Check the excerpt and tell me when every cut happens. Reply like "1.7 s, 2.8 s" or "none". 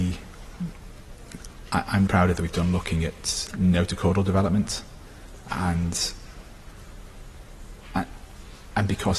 2.1 s, 2.4 s, 3.5 s, 5.5 s